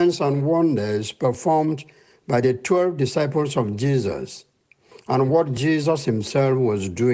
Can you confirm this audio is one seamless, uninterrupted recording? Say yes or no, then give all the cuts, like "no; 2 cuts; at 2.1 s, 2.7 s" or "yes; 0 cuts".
yes; 0 cuts